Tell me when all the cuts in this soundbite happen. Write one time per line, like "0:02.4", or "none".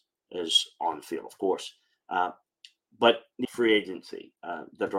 0:03.4